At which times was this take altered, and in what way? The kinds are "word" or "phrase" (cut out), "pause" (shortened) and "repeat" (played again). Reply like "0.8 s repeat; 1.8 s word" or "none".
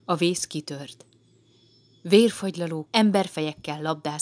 2.9 s word